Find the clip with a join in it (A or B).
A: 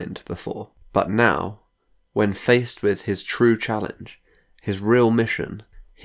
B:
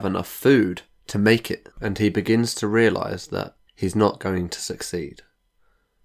B